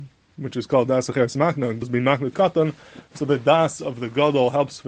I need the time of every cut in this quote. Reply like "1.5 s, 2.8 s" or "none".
1.8 s, 2.3 s